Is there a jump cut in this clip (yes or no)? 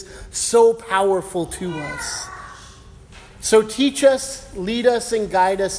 no